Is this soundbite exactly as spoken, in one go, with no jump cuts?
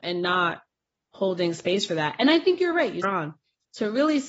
no; 1 cut; at 3.0 s

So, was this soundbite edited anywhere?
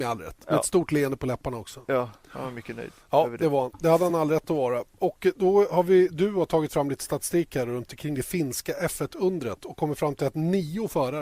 no; 0 cuts

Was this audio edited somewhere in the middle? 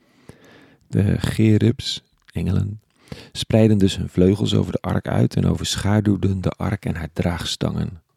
no; 0 cuts

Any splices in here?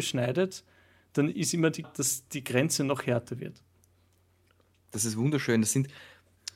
yes; 1 cut; at 1.8 s

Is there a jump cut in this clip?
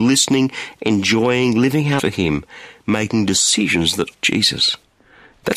yes; 2 cuts; at 2.0 s, 4.1 s

